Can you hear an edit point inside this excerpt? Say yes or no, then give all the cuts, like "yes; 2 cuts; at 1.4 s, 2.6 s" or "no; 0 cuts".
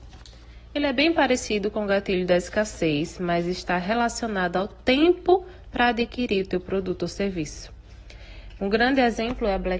no; 0 cuts